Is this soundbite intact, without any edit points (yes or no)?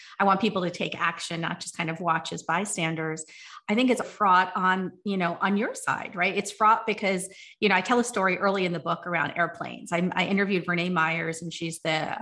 no